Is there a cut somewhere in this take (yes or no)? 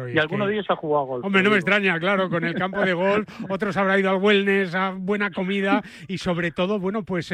no